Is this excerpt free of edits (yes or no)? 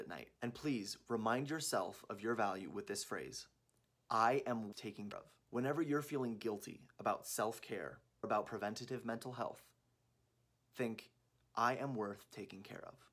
no